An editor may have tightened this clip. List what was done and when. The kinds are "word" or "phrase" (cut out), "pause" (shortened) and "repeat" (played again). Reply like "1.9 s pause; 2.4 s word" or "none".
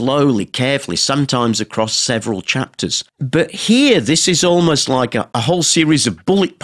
3.1 s pause

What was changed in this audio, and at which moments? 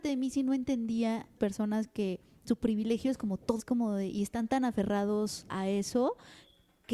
1.4 s phrase; 3.6 s phrase; 5.5 s word

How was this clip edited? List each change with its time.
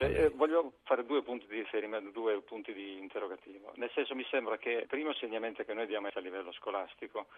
4.8 s word; 6.1 s word

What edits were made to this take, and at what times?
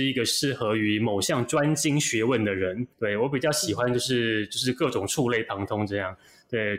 2.9 s pause

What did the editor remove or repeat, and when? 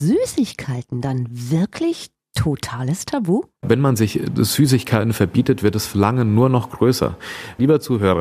none

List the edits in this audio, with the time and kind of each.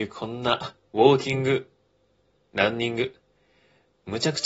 none

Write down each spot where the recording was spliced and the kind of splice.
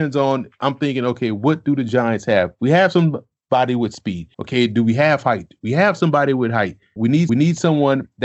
4.3 s pause; 7.0 s word; 7.3 s repeat

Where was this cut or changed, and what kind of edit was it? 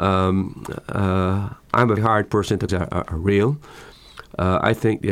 2.0 s word; 2.7 s phrase

